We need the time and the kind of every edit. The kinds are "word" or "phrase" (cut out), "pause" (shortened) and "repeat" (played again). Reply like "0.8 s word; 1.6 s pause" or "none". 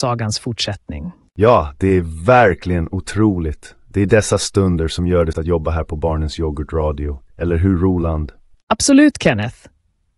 5.3 s phrase; 7.3 s pause; 8.5 s pause